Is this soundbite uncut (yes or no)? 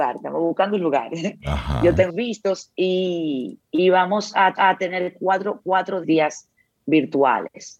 no